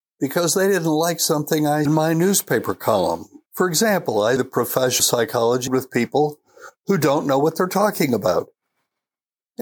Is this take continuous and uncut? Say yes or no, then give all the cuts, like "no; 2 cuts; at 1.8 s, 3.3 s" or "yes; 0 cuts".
no; 5 cuts; at 1.9 s, 3.5 s, 4.4 s, 5.0 s, 5.7 s